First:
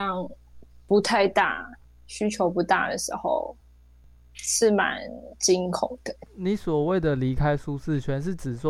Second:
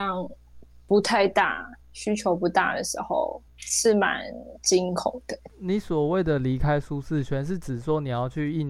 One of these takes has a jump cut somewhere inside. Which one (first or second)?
second